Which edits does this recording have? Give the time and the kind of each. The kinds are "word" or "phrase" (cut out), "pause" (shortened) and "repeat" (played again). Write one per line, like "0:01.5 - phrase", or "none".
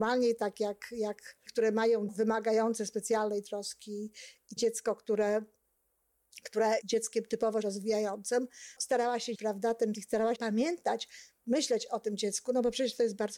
0:01.5 - word
0:02.1 - word
0:04.6 - word
0:06.8 - word
0:07.6 - word
0:08.8 - word
0:09.3 - word
0:09.9 - word
0:10.4 - word